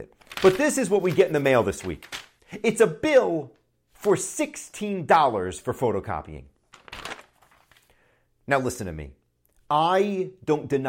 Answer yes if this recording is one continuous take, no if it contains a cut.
yes